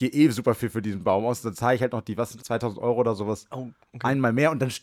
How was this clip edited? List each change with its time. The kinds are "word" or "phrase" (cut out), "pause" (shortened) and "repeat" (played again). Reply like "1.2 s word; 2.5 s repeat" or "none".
2.4 s word